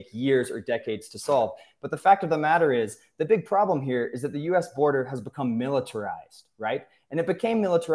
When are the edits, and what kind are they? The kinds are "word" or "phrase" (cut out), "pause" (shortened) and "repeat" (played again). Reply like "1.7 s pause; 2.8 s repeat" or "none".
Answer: none

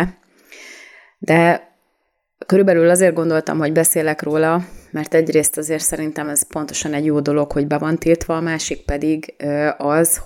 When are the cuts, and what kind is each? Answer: none

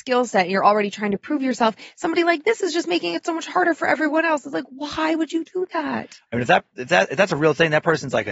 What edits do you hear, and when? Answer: none

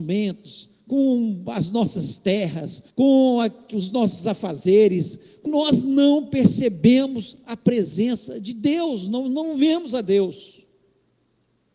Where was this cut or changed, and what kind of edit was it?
2.9 s pause; 5.5 s phrase

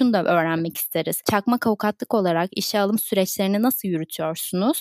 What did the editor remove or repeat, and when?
none

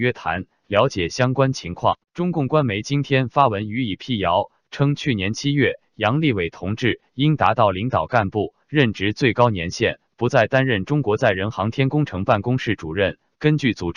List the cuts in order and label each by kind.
2.1 s pause

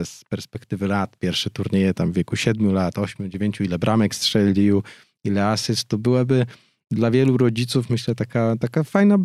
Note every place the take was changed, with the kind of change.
none

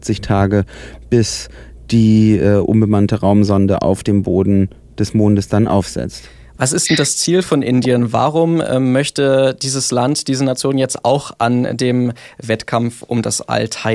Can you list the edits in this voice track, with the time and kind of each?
none

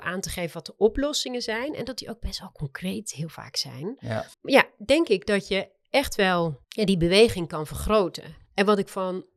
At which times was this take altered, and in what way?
4.3 s pause; 6.6 s pause; 8.5 s pause

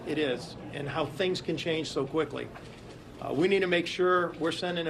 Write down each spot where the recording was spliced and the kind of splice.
none

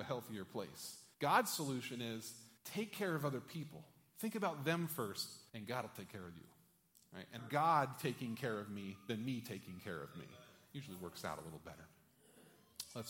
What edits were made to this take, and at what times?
1.1 s pause; 2.6 s pause; 5.5 s pause; 7.4 s phrase

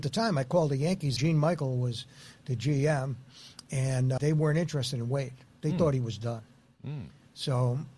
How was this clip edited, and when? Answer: 1.2 s word; 4.2 s word

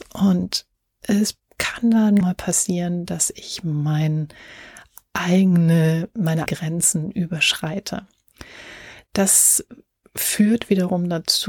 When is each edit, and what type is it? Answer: 2.2 s word; 6.5 s word

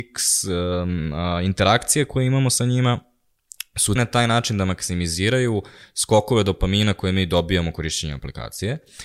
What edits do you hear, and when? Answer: 4.0 s word

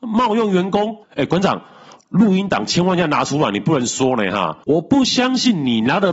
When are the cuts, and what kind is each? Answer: 1.0 s pause; 4.6 s pause

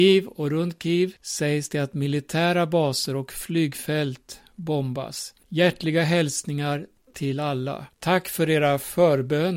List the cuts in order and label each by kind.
1.2 s pause; 5.4 s pause; 7.9 s pause

